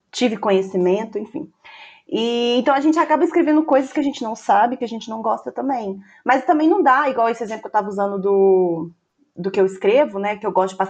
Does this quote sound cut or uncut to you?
uncut